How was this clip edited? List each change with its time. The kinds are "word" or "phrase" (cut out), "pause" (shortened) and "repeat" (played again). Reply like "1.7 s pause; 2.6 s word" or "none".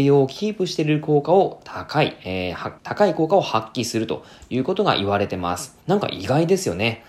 2.8 s pause; 5.8 s pause

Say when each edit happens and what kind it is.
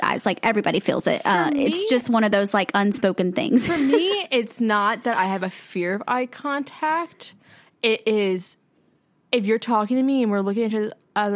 none

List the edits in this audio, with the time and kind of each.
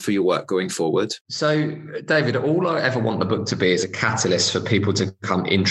1.2 s pause

